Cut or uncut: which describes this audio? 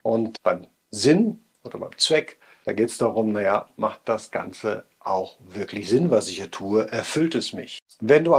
uncut